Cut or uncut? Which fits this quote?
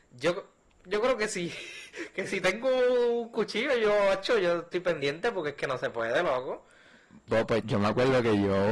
cut